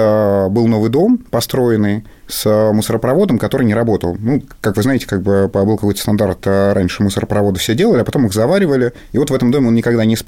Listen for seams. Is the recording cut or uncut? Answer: uncut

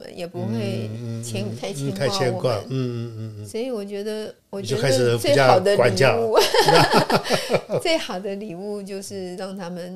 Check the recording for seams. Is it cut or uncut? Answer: cut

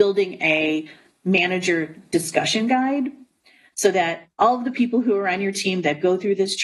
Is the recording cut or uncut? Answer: uncut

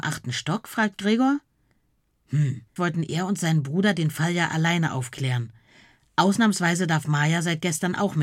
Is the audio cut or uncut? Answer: cut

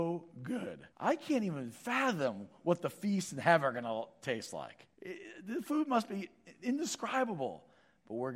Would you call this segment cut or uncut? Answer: cut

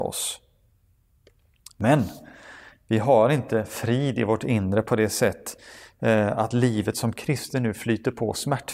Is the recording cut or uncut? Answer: uncut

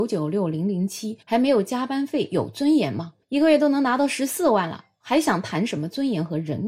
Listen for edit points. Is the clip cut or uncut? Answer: cut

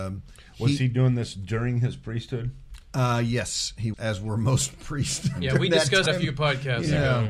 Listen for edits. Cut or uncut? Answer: cut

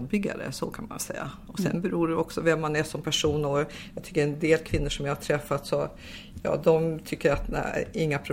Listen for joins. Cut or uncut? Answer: cut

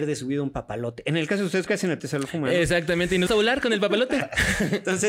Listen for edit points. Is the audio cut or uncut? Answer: cut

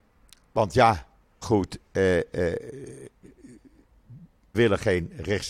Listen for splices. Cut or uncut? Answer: cut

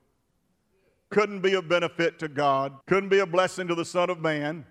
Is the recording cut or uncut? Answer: cut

